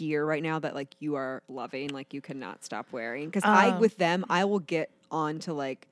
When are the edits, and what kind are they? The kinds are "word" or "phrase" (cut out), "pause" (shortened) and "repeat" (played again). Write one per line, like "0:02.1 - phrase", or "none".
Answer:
none

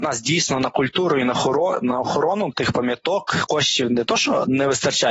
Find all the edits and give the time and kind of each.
none

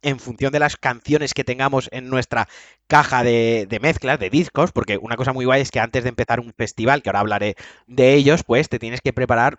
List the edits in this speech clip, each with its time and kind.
none

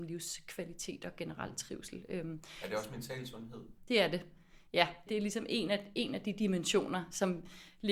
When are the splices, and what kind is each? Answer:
0:03.8 - pause
0:05.1 - word

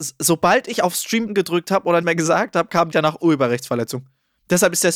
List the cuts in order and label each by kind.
0:01.3 - word
0:02.0 - word
0:02.9 - word

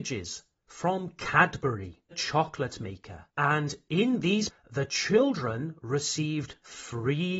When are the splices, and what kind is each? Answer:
0:02.1 - word
0:03.3 - pause
0:04.5 - word

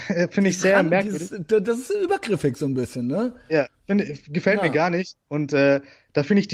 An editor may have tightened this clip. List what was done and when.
none

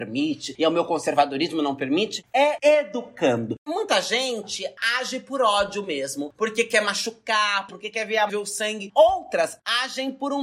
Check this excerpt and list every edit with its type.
0:08.3 - phrase

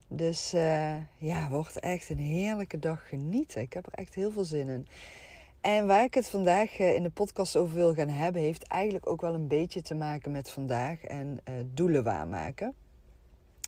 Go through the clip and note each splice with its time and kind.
none

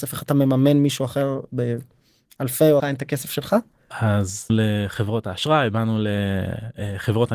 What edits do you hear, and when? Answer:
0:02.8 - phrase
0:04.5 - word

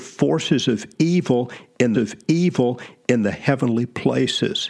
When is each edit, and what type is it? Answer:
0:01.9 - repeat

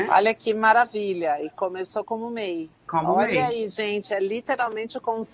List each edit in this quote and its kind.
0:02.8 - pause

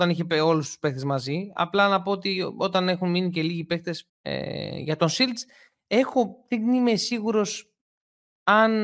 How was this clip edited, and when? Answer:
0:04.1 - pause

